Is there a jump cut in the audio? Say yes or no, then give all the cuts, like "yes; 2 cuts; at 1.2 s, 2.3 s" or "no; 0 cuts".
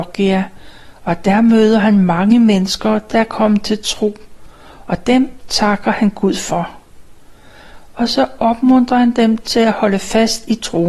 no; 0 cuts